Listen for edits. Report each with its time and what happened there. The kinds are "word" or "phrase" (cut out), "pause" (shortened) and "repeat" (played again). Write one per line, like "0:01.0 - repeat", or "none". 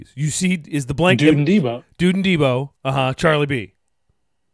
0:02.8 - pause